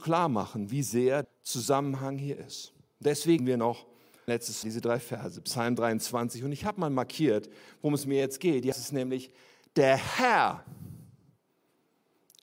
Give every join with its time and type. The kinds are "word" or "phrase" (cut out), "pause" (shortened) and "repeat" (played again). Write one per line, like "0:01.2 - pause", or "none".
0:01.2 - word
0:03.4 - word
0:04.3 - word
0:04.6 - word
0:08.7 - word